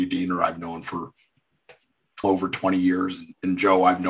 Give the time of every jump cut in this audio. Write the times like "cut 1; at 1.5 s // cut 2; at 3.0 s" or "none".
cut 1; at 2.2 s